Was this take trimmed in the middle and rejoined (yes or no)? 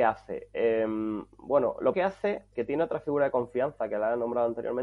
yes